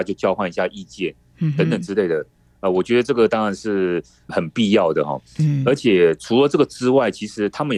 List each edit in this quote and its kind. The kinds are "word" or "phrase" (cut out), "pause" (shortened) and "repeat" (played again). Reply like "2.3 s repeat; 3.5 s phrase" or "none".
none